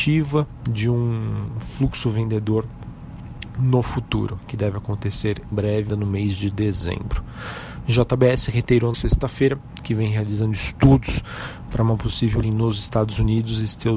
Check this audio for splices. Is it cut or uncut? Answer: cut